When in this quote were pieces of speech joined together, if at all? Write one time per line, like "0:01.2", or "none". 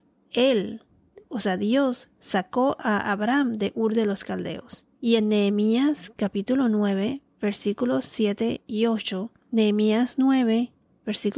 0:04.9
0:09.4